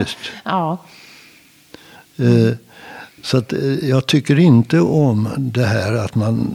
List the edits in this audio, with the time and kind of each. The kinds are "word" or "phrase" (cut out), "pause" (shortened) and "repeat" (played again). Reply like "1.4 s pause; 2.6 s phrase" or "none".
none